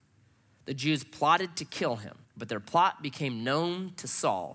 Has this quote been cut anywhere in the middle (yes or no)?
yes